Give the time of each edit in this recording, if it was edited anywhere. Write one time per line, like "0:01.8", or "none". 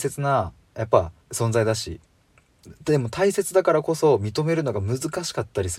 0:01.2